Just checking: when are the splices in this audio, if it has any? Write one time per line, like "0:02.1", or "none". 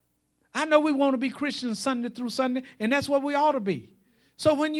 none